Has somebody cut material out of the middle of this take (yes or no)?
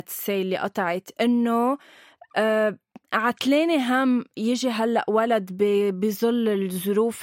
no